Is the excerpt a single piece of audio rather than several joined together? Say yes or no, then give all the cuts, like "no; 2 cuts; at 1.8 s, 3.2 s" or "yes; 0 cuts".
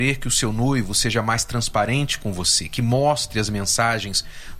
yes; 0 cuts